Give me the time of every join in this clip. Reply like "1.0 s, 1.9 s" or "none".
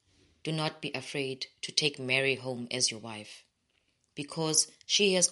none